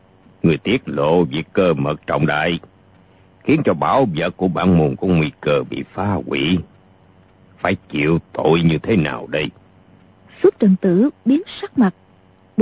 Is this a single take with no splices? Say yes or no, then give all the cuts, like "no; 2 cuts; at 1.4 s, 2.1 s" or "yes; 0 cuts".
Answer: yes; 0 cuts